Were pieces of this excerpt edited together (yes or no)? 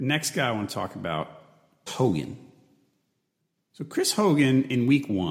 yes